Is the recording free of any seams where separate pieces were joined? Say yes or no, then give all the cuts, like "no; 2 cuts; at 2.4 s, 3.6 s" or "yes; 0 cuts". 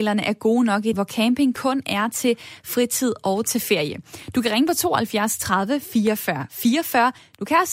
no; 1 cut; at 0.9 s